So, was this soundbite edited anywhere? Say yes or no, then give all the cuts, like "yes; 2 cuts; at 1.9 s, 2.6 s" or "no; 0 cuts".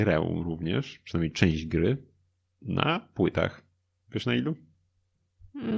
no; 0 cuts